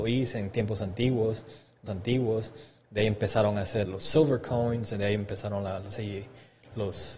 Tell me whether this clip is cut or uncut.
cut